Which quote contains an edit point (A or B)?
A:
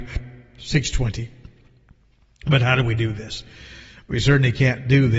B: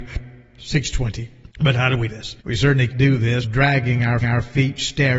B